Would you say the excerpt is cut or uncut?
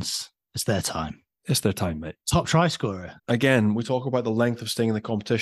cut